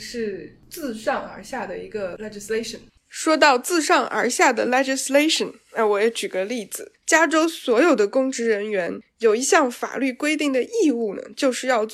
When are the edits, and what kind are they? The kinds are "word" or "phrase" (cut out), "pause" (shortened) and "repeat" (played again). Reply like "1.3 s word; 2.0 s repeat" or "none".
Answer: none